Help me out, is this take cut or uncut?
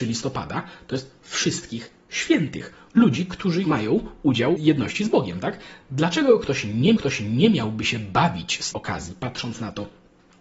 cut